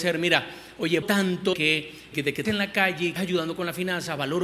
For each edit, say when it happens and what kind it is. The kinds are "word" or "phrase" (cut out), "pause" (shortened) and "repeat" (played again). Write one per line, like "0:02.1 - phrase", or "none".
0:01.0 - word
0:01.5 - word
0:02.1 - word
0:02.5 - word
0:03.2 - word